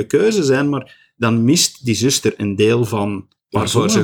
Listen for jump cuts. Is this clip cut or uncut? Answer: uncut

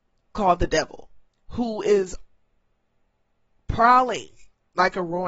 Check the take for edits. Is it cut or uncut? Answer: cut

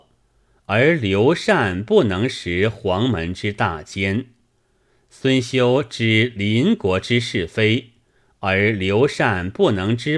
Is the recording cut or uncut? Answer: uncut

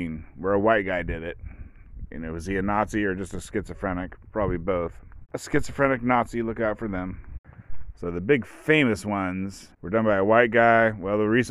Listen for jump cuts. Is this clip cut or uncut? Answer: cut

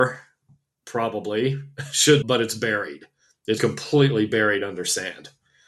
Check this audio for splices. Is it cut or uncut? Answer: cut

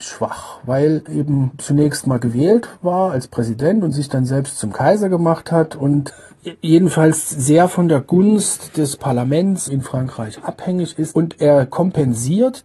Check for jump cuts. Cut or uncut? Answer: cut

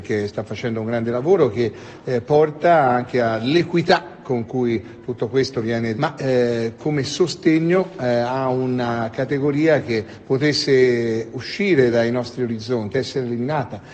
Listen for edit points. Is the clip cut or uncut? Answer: cut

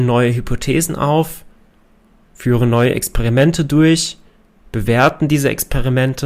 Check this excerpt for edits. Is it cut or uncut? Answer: uncut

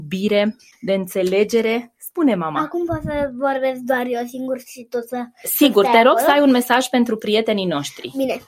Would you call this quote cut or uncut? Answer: uncut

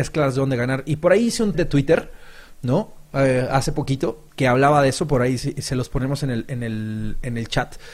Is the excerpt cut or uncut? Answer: cut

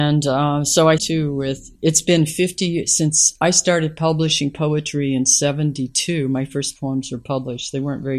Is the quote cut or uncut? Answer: cut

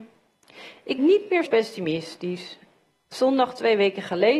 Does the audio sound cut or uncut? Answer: cut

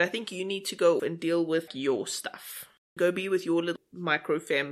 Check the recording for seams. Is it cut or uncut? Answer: cut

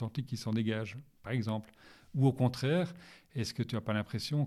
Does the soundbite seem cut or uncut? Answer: uncut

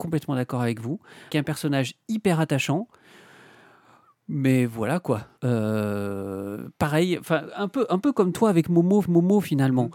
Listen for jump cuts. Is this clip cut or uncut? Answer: cut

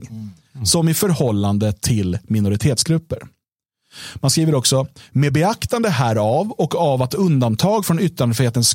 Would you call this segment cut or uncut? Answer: uncut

